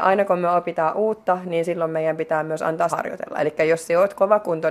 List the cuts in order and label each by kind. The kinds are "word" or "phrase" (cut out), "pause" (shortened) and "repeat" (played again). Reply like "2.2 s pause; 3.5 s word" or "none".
2.9 s phrase